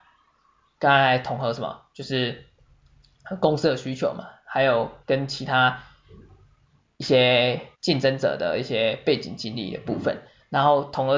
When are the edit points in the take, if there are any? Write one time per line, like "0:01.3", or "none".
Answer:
0:05.0
0:07.7